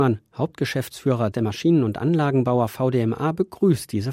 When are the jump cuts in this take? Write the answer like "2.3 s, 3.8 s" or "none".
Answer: 1.3 s